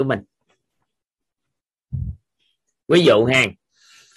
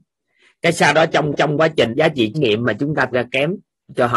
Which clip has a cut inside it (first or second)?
second